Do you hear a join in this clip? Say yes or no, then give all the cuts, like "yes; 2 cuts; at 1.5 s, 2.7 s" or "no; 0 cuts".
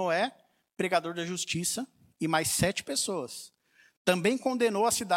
no; 0 cuts